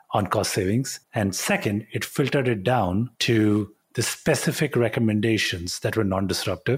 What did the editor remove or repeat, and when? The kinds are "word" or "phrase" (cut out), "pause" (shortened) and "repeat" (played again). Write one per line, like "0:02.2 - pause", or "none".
0:01.0 - pause
0:03.1 - pause